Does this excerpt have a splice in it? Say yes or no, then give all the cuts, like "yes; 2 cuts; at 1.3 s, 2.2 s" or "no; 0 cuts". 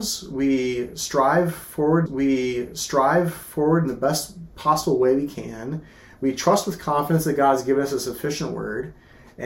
yes; 1 cut; at 2.1 s